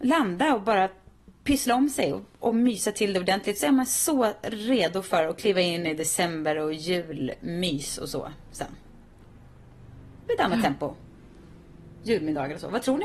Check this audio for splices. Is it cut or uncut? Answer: uncut